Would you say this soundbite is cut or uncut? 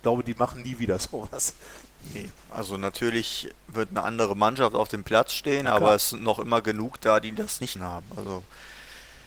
cut